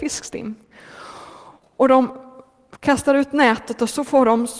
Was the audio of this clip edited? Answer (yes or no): no